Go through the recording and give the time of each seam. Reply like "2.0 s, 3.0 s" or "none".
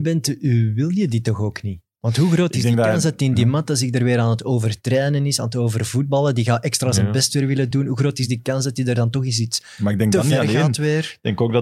none